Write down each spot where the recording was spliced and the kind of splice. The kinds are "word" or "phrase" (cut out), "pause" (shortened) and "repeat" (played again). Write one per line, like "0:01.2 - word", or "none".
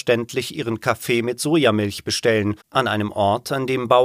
0:02.6 - pause